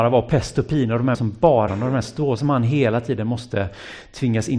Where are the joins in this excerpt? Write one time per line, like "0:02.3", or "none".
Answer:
0:01.1
0:01.7
0:02.4